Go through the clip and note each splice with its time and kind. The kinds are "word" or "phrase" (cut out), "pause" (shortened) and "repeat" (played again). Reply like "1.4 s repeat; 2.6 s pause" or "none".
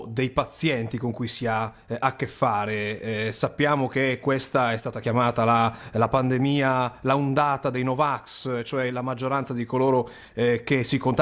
none

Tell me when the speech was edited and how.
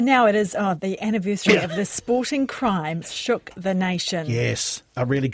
3.0 s word

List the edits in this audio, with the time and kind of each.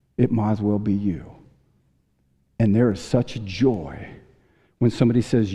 none

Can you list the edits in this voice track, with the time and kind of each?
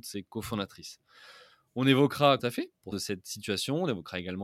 2.4 s word; 2.9 s word

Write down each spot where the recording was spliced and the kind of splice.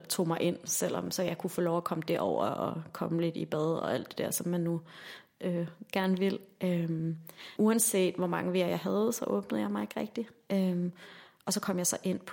7.6 s word

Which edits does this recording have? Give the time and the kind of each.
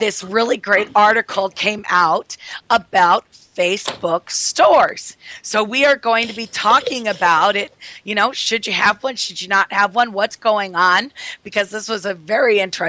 none

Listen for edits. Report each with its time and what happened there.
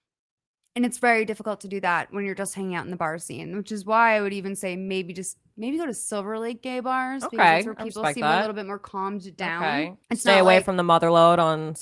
10.0 s pause

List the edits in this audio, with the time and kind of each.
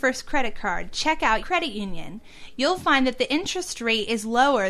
1.4 s word

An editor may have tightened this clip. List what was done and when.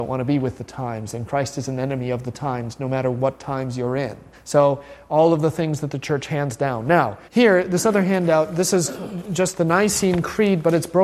4.3 s pause; 7.3 s pause

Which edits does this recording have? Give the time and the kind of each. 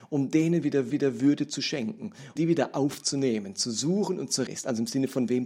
0.9 s repeat; 2.4 s word; 4.5 s phrase

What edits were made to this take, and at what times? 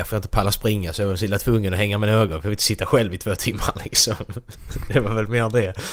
none

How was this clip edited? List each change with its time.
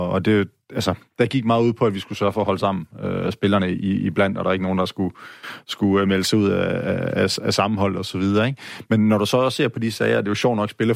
none

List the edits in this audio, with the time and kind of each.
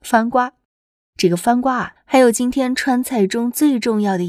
2.0 s phrase

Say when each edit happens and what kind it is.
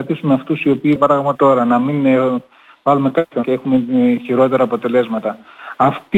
1.0 s word; 1.4 s word; 3.4 s word

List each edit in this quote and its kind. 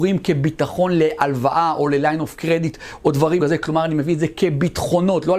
3.4 s word

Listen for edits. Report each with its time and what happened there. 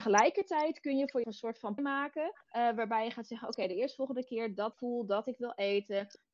1.2 s word; 1.8 s phrase; 2.4 s pause; 4.7 s word

